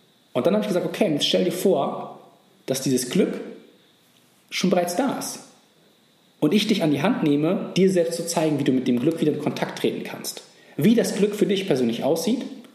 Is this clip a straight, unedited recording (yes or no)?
yes